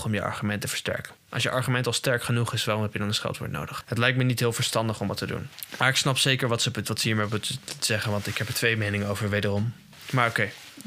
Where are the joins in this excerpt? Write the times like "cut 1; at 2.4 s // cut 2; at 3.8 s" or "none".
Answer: none